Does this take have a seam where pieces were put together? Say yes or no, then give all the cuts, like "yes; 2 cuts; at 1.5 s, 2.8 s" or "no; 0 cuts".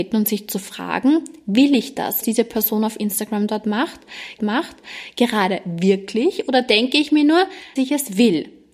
yes; 3 cuts; at 2.2 s, 4.4 s, 7.8 s